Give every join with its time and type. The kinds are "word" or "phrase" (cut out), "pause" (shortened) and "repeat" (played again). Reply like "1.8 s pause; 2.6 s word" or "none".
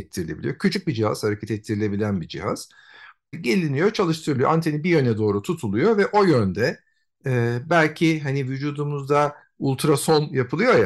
3.3 s word